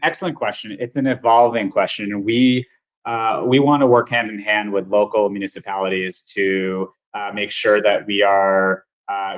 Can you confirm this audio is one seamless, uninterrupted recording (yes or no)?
yes